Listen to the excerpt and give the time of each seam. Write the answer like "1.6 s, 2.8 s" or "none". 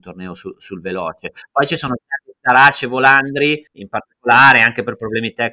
3.7 s